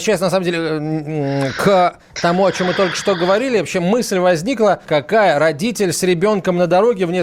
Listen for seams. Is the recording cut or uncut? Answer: cut